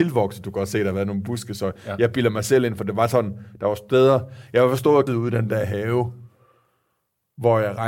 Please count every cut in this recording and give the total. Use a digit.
1